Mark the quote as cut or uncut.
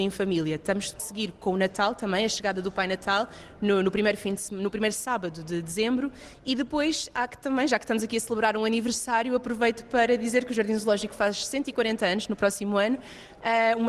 cut